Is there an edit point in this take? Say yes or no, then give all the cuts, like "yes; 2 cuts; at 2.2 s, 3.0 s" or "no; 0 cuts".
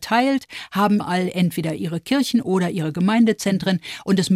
yes; 1 cut; at 1.0 s